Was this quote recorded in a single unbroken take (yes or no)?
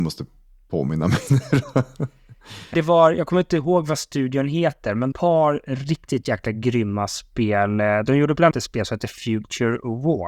no